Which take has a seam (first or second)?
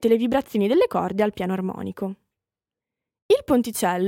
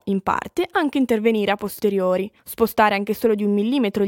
second